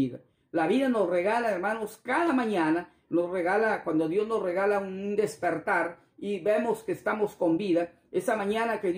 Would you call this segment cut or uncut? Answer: uncut